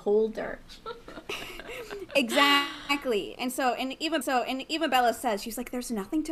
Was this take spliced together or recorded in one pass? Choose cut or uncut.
cut